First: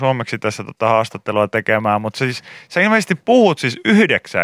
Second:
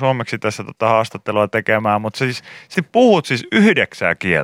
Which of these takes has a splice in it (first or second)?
second